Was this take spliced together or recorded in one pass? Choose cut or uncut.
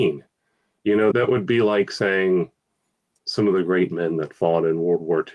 cut